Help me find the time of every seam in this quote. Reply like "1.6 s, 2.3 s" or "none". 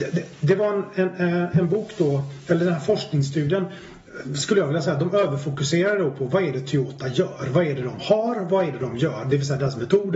none